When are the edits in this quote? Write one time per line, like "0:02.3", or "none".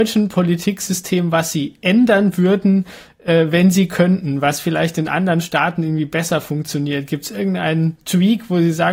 none